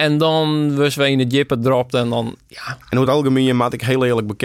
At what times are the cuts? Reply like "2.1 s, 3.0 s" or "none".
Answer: none